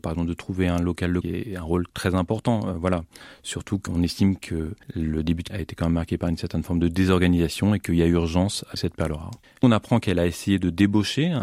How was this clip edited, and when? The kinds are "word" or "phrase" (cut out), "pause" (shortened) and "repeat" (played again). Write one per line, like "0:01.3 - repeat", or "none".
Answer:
0:01.2 - phrase
0:01.9 - pause
0:03.9 - word
0:04.8 - pause
0:05.5 - word
0:08.8 - word
0:09.4 - pause

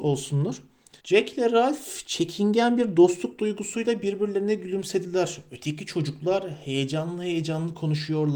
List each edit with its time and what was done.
0:01.0 - pause

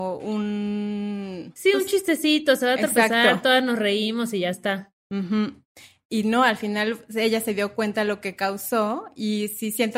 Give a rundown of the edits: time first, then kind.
none

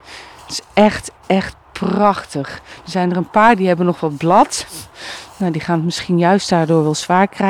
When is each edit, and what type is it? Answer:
none

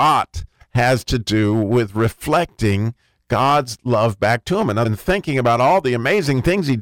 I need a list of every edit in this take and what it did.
0:04.8 - phrase

